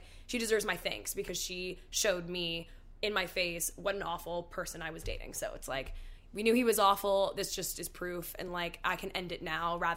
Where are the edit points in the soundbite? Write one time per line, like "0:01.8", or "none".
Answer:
none